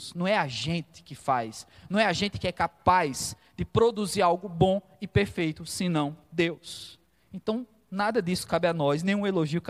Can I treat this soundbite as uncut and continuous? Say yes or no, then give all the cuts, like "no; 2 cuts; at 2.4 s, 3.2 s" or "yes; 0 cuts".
no; 1 cut; at 6.2 s